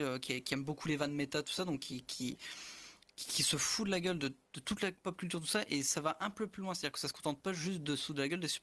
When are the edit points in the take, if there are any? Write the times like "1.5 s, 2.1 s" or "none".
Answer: none